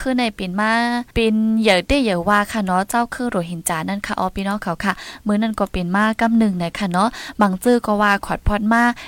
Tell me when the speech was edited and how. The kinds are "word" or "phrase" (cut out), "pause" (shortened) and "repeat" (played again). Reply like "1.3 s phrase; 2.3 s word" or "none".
1.1 s pause